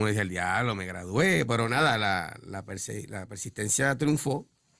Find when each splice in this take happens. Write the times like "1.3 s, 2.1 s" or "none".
none